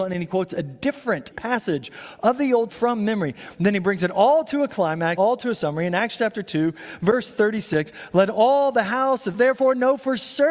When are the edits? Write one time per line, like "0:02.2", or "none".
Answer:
0:01.3
0:02.7
0:05.2
0:09.3